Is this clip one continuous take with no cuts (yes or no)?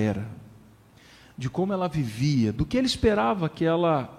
yes